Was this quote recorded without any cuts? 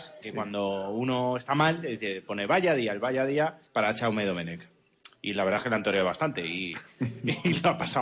no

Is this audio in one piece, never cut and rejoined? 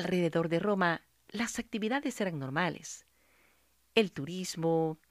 yes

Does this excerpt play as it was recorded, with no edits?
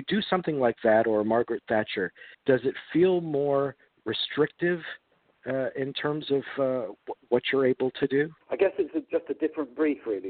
no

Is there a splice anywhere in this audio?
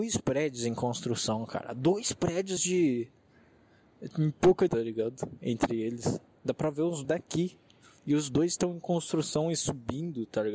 yes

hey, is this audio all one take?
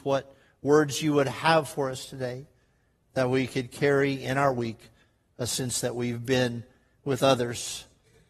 yes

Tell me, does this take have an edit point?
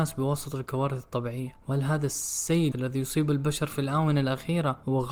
yes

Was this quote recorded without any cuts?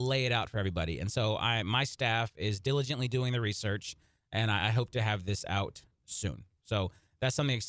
yes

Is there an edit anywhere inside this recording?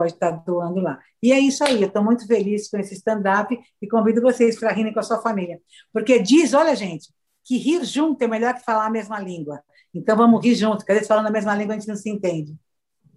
no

